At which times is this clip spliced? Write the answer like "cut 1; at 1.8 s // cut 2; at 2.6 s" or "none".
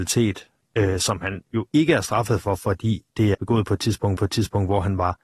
cut 1; at 3.3 s // cut 2; at 4.2 s